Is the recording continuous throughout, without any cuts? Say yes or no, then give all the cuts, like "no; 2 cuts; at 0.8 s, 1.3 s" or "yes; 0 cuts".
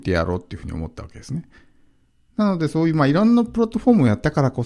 yes; 0 cuts